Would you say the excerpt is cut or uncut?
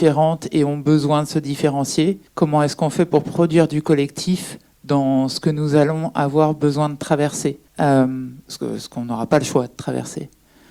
cut